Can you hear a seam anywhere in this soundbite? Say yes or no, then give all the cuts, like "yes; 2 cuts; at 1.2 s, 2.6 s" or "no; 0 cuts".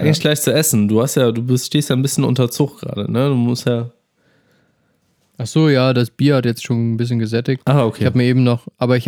no; 0 cuts